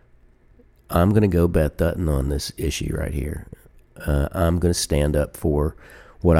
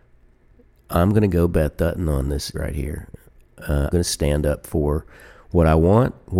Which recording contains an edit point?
second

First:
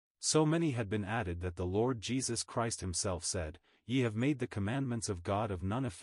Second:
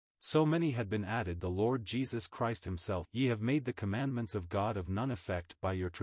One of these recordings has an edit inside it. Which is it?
second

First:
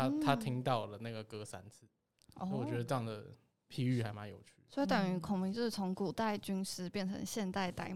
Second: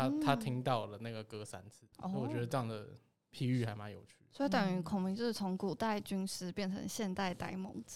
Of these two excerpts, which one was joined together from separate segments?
second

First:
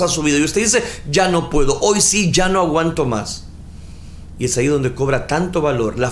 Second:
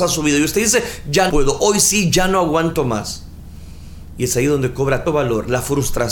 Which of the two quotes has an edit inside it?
second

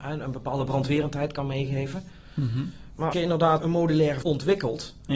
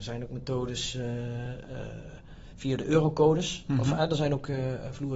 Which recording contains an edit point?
first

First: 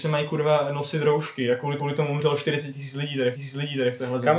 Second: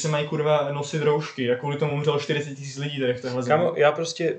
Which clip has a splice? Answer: first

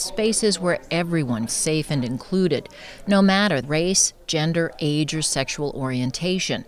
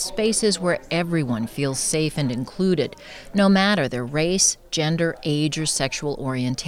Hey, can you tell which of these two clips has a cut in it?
first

